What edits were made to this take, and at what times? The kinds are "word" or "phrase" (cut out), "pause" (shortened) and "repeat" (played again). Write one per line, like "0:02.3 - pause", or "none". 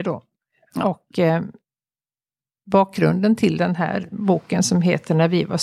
none